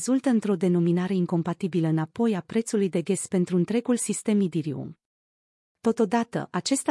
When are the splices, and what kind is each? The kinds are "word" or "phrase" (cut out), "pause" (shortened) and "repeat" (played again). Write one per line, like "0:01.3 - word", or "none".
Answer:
none